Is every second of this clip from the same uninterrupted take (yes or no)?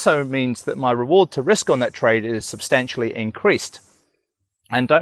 yes